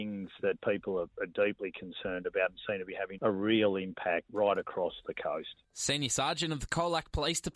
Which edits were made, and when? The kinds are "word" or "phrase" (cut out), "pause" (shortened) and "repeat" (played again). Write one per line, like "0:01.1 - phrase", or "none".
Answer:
none